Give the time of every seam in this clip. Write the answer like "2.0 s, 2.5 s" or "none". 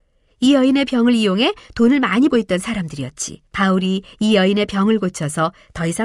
2.3 s, 3.5 s